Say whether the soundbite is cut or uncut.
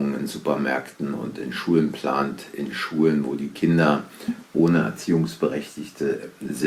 uncut